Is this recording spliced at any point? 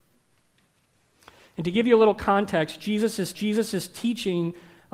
yes; 1 cut; at 3.3 s

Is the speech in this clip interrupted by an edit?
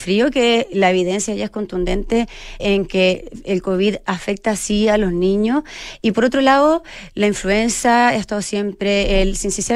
yes; 1 cut; at 2.6 s

